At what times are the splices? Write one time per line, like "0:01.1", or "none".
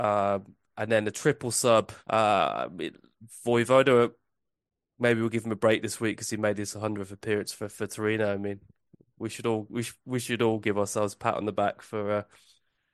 0:02.0